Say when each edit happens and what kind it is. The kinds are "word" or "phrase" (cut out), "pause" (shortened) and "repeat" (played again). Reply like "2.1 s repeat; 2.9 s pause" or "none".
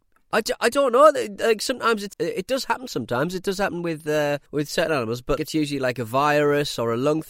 2.1 s word; 4.5 s pause; 5.4 s word